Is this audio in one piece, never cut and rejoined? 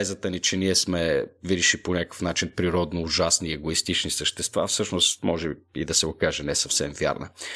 yes; 0 cuts

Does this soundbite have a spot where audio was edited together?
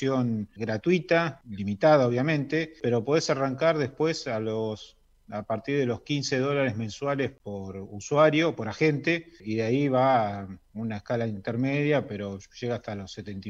no; 0 cuts

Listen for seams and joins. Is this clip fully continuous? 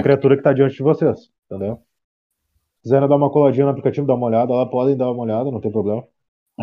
no; 1 cut; at 1.4 s

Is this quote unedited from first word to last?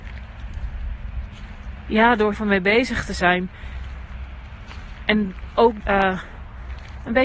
no; 2 cuts; at 2.3 s, 5.8 s

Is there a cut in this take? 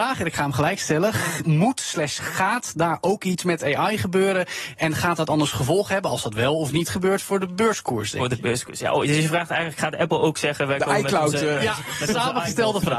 no; 0 cuts

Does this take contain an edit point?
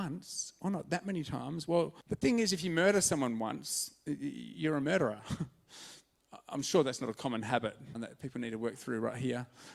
yes; 2 cuts; at 2.0 s, 7.9 s

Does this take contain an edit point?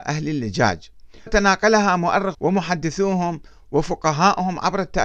yes; 2 cuts; at 1.3 s, 2.3 s

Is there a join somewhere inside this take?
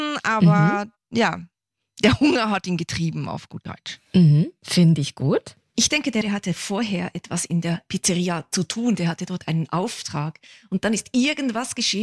yes; 1 cut; at 6.2 s

